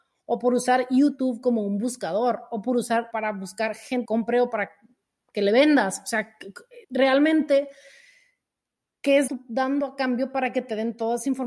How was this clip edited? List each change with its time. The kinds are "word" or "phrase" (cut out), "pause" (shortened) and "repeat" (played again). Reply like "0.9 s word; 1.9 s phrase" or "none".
3.1 s word; 4.0 s phrase; 6.8 s pause; 9.3 s phrase